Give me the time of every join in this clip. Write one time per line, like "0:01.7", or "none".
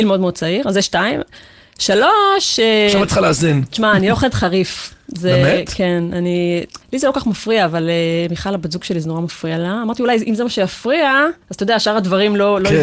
0:06.8
0:11.4